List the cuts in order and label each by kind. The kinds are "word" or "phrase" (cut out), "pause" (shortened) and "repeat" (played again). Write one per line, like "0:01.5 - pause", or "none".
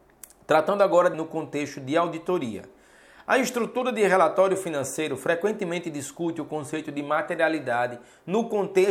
0:01.1 - word